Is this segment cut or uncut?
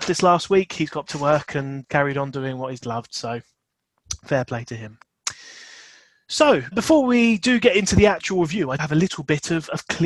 cut